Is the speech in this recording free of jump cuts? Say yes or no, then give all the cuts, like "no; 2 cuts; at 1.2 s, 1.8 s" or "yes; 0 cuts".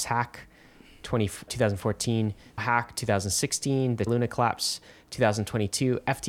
no; 3 cuts; at 1.5 s, 2.6 s, 4.1 s